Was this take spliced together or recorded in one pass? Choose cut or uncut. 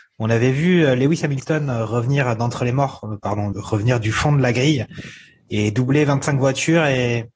cut